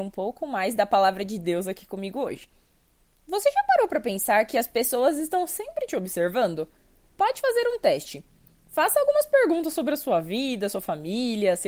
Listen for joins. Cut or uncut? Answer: uncut